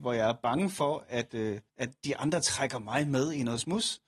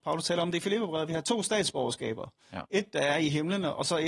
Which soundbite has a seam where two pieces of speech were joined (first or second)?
first